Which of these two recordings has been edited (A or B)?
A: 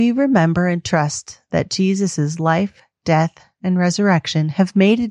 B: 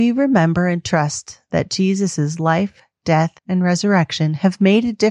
B